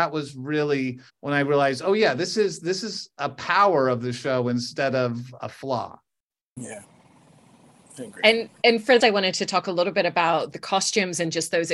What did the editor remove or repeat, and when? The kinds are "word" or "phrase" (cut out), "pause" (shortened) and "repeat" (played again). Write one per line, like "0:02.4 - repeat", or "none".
0:01.1 - pause
0:05.4 - word
0:09.0 - phrase
0:10.5 - word